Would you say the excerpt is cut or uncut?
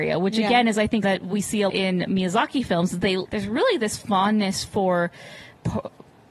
cut